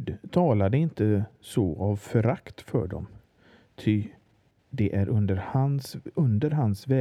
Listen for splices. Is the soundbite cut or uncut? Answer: uncut